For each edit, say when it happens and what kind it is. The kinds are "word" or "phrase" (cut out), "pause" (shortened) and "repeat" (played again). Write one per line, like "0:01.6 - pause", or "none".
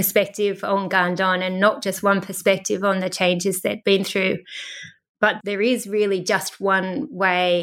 none